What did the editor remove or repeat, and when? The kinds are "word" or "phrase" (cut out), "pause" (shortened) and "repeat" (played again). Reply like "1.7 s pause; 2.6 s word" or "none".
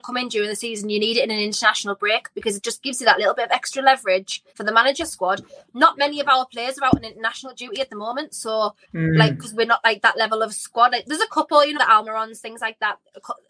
4.5 s pause; 5.0 s phrase; 8.8 s pause; 11.7 s word